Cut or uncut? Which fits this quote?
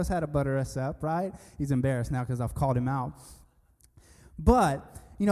uncut